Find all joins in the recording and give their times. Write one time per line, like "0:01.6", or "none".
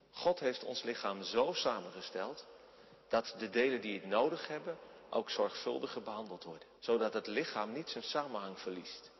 0:06.8